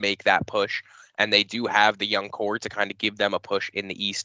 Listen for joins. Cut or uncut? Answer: uncut